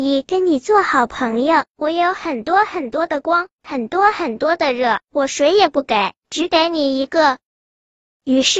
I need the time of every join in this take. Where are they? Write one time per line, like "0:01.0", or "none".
0:07.5